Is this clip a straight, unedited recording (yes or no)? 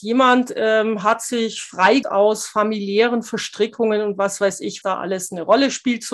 no